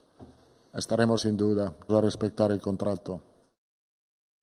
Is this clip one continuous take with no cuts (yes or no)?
no